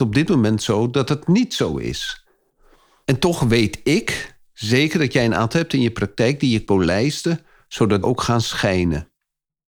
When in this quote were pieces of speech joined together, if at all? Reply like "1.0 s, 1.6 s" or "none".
5.5 s, 6.7 s, 8.0 s